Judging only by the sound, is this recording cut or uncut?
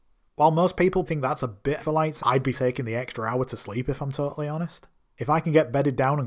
cut